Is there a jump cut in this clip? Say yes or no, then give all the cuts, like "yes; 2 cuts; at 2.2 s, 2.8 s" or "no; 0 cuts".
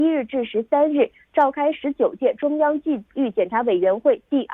no; 0 cuts